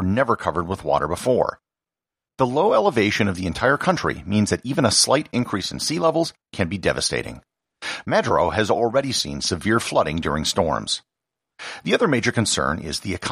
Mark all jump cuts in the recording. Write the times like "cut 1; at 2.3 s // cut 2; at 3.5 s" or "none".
none